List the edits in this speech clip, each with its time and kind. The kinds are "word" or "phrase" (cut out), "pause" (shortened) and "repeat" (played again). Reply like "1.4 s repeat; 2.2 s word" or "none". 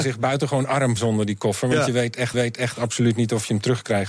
1.0 s word; 2.3 s repeat